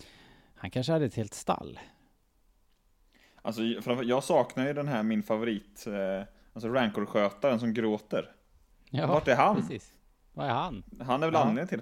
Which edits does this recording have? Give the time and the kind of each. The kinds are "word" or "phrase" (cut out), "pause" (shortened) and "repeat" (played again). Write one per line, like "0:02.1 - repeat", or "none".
none